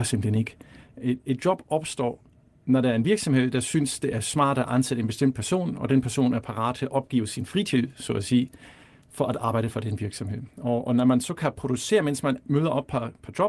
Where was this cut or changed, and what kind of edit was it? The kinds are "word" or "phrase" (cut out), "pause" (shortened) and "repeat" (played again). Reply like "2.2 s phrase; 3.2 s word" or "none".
none

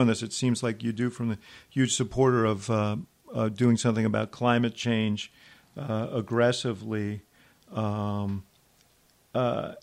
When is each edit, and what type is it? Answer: none

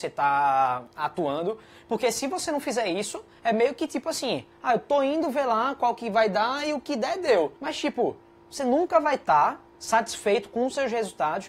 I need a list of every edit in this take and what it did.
7.6 s pause; 9.7 s pause

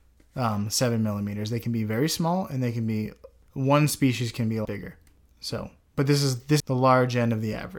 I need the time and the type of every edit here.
4.6 s word; 6.6 s word

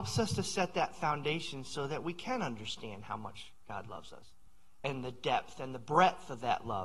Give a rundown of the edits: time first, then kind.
none

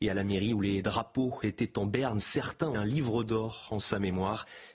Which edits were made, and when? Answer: 2.7 s word

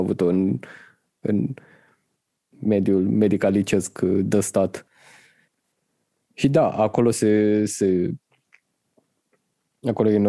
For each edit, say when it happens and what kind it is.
none

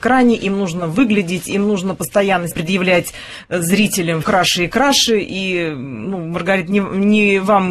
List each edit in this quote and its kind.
2.5 s word; 4.2 s word

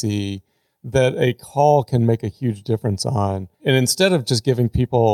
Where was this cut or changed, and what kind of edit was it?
3.5 s pause

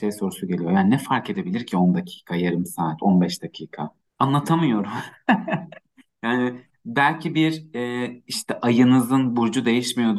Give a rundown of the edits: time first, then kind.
4.1 s pause

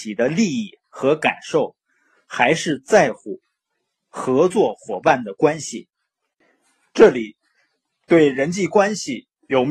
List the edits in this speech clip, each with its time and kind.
none

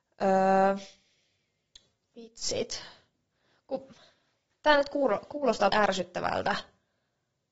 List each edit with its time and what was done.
5.7 s word

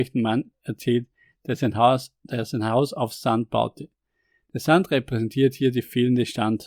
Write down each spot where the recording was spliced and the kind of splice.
none

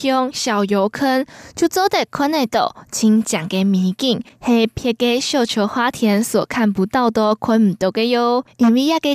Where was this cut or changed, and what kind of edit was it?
none

